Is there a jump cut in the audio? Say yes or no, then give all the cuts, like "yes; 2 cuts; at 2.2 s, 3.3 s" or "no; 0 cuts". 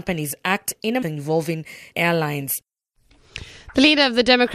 yes; 2 cuts; at 1.0 s, 1.9 s